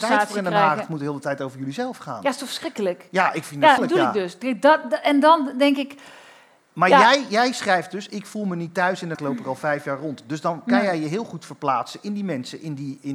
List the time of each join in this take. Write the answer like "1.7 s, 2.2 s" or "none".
3.8 s, 9.1 s